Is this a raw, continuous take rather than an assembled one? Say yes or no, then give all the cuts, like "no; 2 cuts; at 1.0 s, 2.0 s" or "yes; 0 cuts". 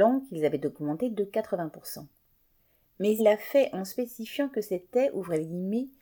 no; 1 cut; at 3.2 s